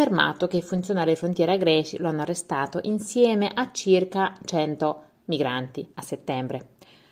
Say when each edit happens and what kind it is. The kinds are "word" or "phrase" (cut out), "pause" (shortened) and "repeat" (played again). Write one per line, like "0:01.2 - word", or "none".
0:05.9 - pause